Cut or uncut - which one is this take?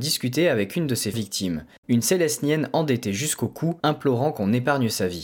cut